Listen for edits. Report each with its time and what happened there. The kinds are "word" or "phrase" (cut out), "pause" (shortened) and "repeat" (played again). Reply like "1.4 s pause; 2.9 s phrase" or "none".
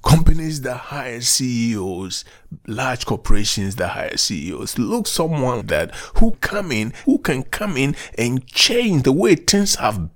5.0 s word; 5.6 s word; 6.3 s word; 7.0 s phrase

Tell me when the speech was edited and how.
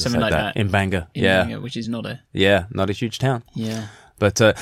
none

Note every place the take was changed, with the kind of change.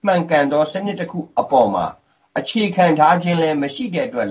none

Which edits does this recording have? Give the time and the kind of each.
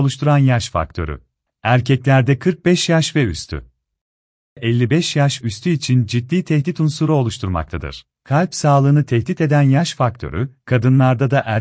1.5 s pause; 4.6 s word; 5.4 s word; 8.1 s pause

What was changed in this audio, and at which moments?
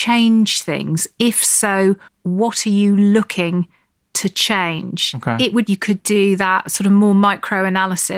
2.1 s pause; 5.7 s phrase

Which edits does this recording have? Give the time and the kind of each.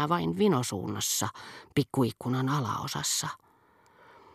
none

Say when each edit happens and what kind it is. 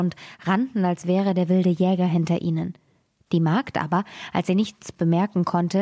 none

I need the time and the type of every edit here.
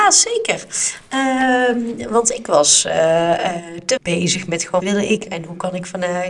4.0 s word; 4.8 s word; 5.3 s word

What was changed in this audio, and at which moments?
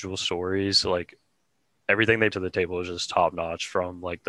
2.3 s word

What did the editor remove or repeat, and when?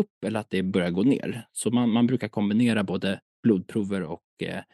none

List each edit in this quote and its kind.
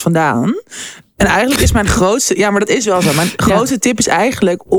none

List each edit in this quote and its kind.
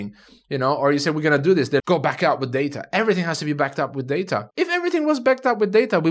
1.8 s word; 4.5 s pause

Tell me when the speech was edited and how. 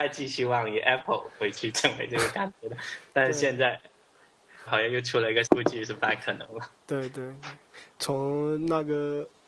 4.7 s word; 5.4 s word; 6.7 s pause; 7.9 s pause

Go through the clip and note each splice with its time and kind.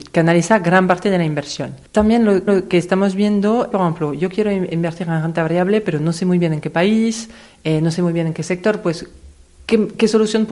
1.9 s pause; 2.5 s repeat; 3.7 s phrase

